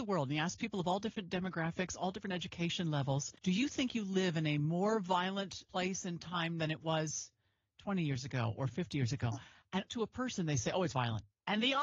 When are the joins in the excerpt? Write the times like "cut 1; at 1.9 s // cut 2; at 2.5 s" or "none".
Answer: cut 1; at 3.4 s // cut 2; at 5.7 s // cut 3; at 6.6 s // cut 4; at 9.9 s // cut 5; at 10.9 s